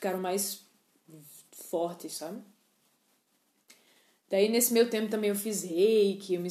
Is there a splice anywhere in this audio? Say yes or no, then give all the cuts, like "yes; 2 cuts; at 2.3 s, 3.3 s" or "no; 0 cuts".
no; 0 cuts